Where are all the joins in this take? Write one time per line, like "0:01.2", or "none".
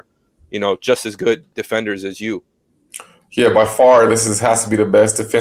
none